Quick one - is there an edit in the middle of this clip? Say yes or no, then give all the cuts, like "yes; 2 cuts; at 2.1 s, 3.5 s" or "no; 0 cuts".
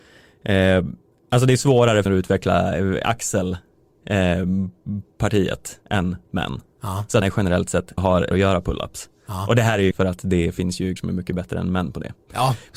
yes; 8 cuts; at 1.1 s, 2.1 s, 5.8 s, 7.2 s, 8.0 s, 8.3 s, 9.9 s, 11.0 s